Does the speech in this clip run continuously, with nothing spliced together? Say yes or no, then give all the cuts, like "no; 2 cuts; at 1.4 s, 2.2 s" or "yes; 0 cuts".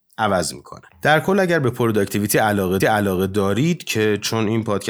no; 1 cut; at 2.8 s